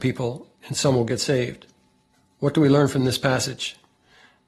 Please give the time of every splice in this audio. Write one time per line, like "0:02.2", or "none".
0:02.1

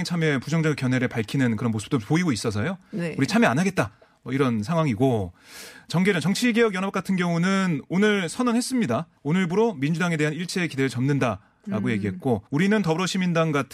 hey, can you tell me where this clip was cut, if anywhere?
0:09.2
0:12.5

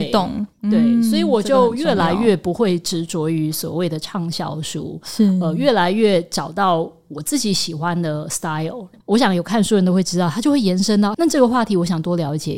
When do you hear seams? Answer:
0:11.1

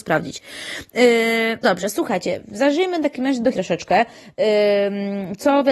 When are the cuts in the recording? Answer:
0:01.6
0:03.5

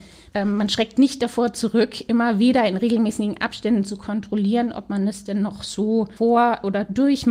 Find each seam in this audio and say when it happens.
0:06.2

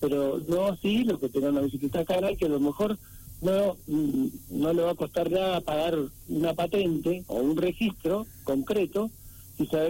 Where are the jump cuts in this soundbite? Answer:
none

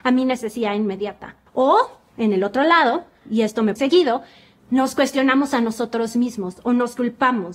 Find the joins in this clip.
0:01.5
0:03.2
0:03.8

